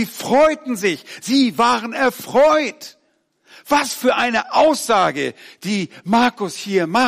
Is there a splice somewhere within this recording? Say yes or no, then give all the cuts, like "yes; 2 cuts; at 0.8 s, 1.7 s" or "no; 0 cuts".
no; 0 cuts